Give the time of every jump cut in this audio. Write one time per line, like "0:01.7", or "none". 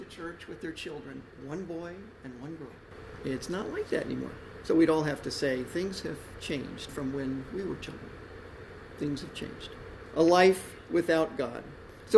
0:01.3
0:06.9